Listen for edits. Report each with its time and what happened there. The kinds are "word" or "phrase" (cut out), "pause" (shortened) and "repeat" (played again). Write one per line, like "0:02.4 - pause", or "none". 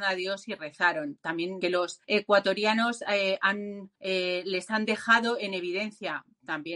0:01.6 - phrase
0:02.0 - pause
0:04.0 - pause